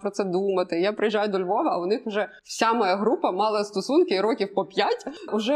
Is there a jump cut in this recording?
yes; 1 cut; at 2.4 s

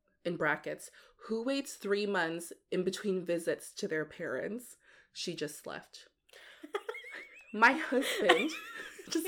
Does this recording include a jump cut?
no; 0 cuts

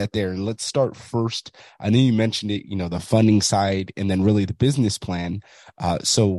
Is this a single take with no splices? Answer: yes; 0 cuts

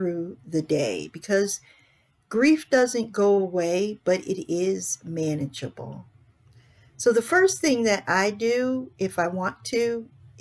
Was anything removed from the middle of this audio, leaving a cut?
no; 0 cuts

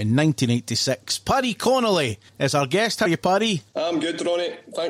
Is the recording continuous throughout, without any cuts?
no; 3 cuts; at 2.3 s, 3.1 s, 3.7 s

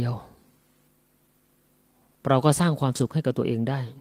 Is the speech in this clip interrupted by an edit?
no; 0 cuts

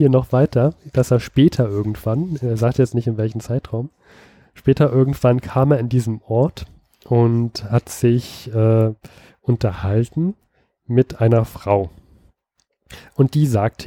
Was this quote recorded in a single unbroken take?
yes; 0 cuts

